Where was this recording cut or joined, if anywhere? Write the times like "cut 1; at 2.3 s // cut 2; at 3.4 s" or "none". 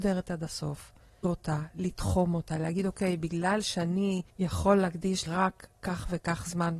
cut 1; at 1.2 s // cut 2; at 4.3 s // cut 3; at 5.3 s